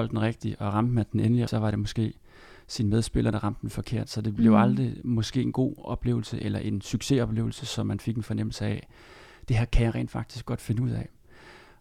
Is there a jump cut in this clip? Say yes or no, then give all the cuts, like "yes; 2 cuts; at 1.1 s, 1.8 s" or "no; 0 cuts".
yes; 1 cut; at 1.5 s